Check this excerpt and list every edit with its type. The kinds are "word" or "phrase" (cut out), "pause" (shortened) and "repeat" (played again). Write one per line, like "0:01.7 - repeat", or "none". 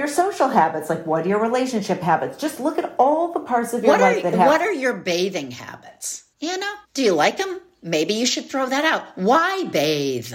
0:06.3 - pause
0:06.8 - pause